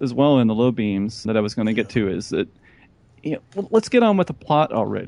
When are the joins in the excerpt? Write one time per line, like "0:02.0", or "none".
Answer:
0:01.3